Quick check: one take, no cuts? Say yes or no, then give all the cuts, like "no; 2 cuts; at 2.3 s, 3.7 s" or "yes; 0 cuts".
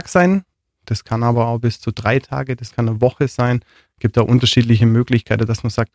yes; 0 cuts